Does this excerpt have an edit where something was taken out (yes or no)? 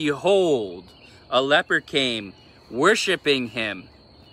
no